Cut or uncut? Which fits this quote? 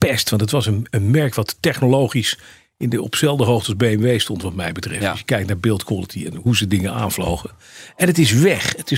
uncut